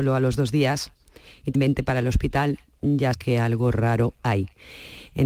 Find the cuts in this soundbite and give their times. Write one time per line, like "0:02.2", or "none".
0:01.5
0:03.1